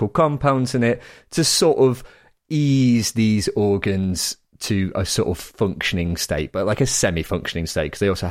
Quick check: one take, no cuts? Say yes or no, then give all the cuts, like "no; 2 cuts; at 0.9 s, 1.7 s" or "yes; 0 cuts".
yes; 0 cuts